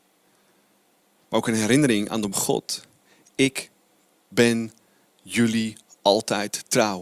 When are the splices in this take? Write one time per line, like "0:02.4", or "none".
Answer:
0:02.3